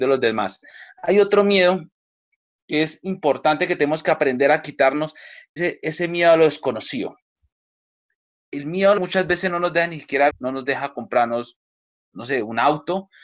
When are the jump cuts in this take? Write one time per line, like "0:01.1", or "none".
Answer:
0:05.6
0:09.0
0:10.3